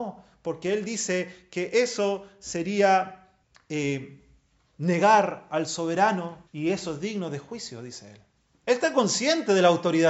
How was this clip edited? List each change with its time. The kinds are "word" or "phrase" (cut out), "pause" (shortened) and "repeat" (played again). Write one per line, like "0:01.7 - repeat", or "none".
0:03.4 - pause
0:06.5 - pause
0:08.4 - pause